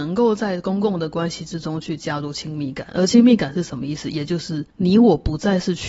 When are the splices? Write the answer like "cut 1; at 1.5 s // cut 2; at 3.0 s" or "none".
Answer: cut 1; at 4.7 s